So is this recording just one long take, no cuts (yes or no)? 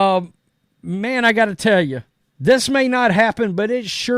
no